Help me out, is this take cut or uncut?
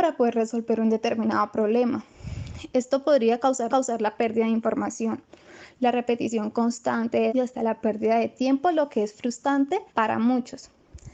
cut